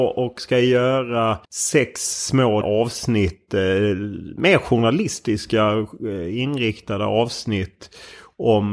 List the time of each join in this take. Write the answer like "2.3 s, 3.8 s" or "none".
1.4 s, 2.6 s